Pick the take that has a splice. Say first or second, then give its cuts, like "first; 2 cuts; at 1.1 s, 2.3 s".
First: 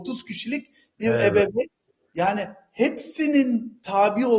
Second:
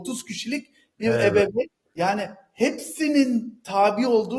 second; 1 cut; at 1.9 s